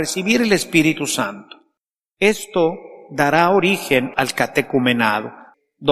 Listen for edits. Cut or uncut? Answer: uncut